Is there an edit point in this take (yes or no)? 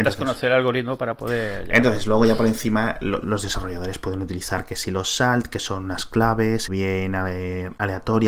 yes